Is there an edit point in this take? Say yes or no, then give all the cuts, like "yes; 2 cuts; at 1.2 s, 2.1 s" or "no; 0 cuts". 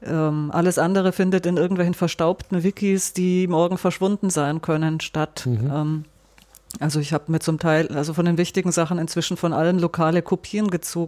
no; 0 cuts